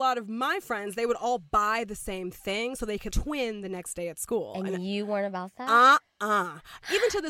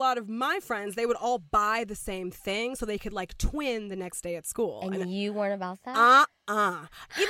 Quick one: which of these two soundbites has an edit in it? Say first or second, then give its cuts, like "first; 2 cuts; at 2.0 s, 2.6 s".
first; 1 cut; at 3.1 s